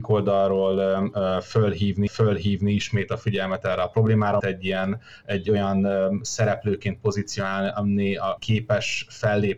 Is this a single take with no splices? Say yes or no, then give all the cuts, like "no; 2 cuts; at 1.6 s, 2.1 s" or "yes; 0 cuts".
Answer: no; 3 cuts; at 2.1 s, 4.4 s, 8.4 s